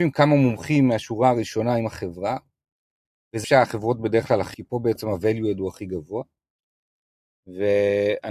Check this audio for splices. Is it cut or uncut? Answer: cut